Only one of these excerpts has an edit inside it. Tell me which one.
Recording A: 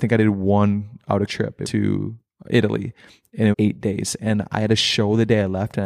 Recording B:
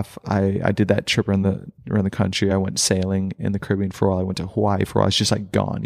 A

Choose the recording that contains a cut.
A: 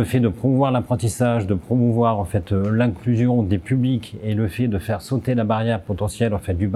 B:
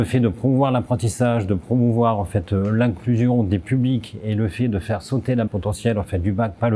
B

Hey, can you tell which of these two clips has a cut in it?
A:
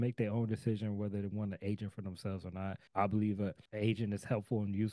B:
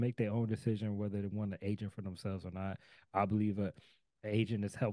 A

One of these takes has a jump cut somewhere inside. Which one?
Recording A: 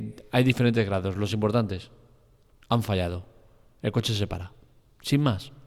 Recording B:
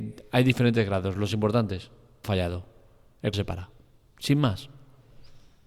B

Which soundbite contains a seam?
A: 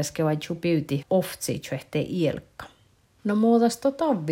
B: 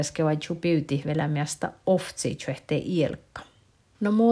A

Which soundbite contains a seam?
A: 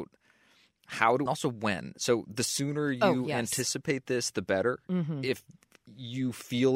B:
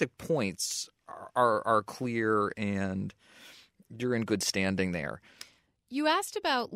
A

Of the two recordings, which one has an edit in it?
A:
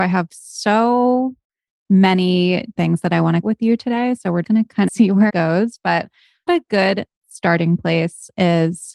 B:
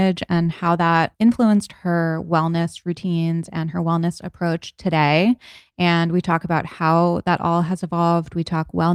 A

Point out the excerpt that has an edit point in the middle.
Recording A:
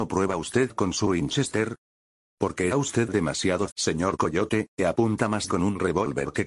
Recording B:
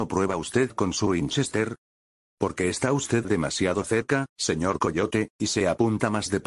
A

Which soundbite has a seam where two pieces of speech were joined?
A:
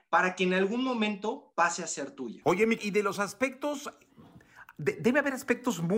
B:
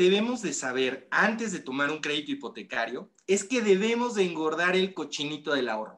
A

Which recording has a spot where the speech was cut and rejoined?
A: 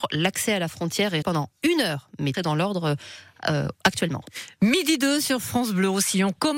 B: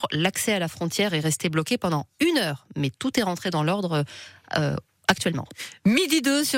A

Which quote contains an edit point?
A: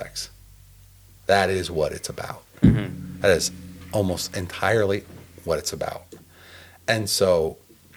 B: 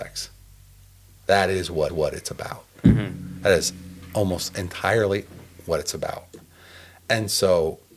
B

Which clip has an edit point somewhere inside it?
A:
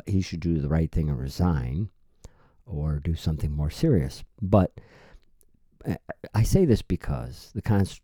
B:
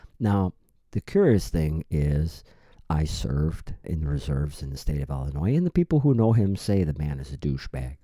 B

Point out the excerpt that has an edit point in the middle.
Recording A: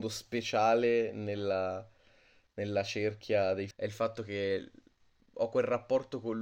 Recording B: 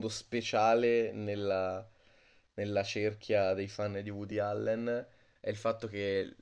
A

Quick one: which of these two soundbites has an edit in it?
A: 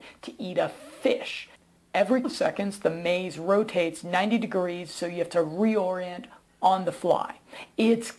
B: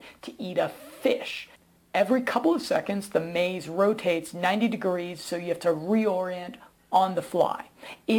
A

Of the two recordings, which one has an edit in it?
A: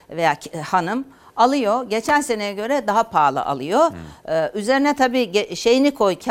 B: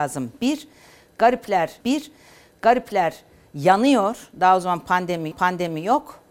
B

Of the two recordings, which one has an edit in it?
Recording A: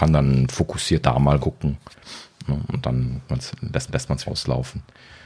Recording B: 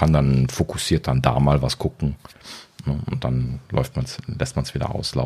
A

